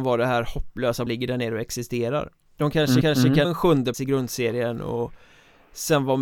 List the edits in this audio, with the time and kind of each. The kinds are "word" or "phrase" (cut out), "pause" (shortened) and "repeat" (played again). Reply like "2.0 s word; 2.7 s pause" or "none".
1.1 s phrase; 2.5 s pause; 3.0 s repeat; 3.4 s word; 3.9 s word